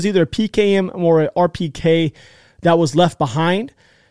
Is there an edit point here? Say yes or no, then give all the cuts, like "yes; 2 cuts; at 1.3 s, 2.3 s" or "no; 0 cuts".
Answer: no; 0 cuts